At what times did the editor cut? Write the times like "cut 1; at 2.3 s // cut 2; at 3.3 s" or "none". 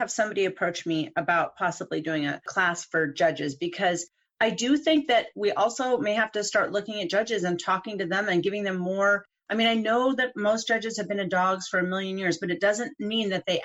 none